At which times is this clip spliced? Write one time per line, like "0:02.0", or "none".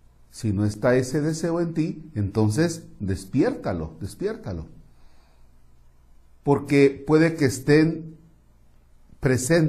none